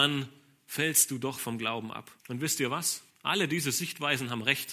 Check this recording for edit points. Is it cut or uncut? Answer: cut